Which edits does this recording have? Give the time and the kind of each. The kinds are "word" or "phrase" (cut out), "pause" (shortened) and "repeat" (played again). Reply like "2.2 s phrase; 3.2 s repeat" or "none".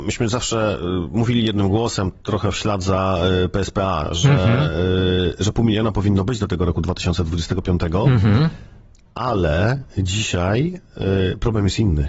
none